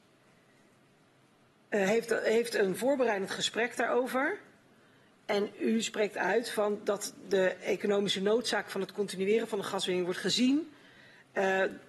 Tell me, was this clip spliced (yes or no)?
no